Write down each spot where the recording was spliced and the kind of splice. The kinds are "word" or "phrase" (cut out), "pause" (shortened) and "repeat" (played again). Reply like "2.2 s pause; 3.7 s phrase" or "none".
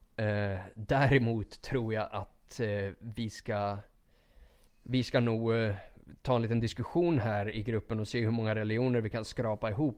4.7 s pause